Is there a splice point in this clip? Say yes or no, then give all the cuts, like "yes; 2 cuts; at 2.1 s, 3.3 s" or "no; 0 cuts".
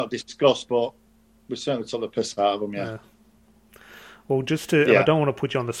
no; 0 cuts